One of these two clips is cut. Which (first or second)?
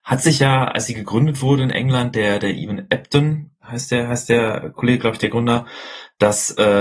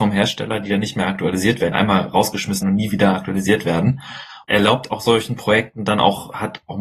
second